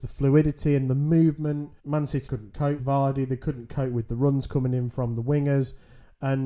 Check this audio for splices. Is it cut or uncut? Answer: cut